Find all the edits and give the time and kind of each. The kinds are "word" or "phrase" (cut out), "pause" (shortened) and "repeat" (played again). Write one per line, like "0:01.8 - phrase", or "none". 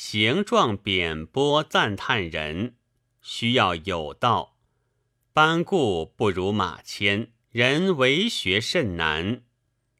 0:07.4 - pause